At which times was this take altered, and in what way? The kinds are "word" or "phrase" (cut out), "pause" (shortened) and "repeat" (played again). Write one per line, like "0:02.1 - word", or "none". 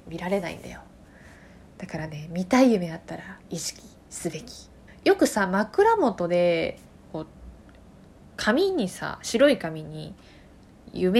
0:03.4 - pause
0:04.9 - phrase

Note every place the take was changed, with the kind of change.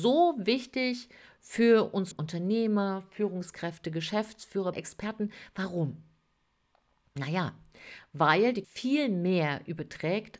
0:02.1 - word
0:04.7 - word
0:08.6 - word

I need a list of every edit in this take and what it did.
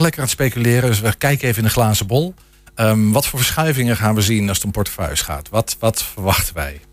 none

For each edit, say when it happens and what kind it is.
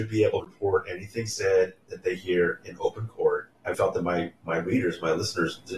0:03.7 - word

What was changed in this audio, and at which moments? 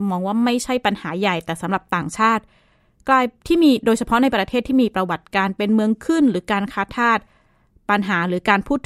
none

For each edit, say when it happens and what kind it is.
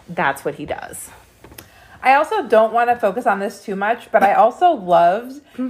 none

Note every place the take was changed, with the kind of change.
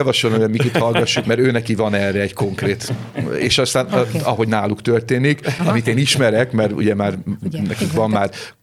0:01.2 - word

